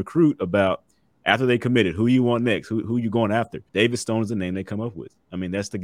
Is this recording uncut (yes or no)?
no